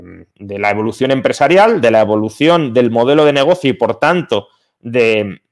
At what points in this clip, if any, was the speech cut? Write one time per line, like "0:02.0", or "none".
none